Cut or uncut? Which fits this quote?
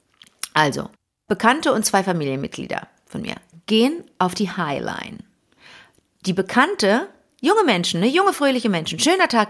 uncut